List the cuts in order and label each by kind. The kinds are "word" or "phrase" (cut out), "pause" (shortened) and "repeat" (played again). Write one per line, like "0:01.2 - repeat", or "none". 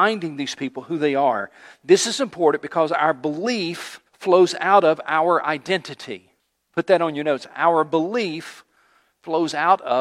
0:04.1 - pause
0:06.4 - pause